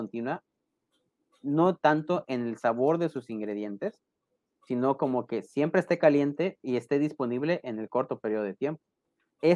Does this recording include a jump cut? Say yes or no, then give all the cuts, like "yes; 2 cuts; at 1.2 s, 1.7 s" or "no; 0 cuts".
no; 0 cuts